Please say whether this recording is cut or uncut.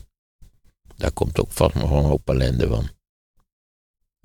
uncut